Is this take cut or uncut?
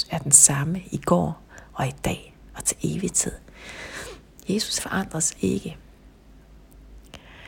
cut